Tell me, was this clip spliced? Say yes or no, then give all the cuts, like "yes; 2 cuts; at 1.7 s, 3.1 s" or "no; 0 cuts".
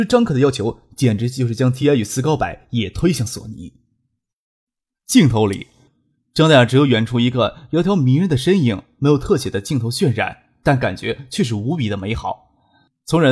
no; 0 cuts